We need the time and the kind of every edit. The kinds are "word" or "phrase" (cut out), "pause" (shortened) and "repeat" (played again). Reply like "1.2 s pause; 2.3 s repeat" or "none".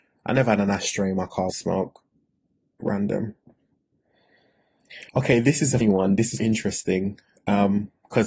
1.5 s phrase; 2.8 s phrase; 5.1 s pause; 5.8 s word; 6.4 s word